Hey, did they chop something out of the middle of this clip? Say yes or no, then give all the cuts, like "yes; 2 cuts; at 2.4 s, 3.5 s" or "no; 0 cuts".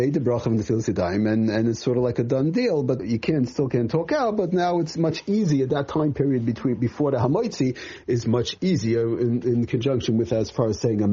yes; 1 cut; at 3.0 s